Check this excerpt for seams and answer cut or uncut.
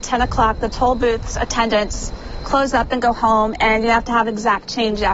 uncut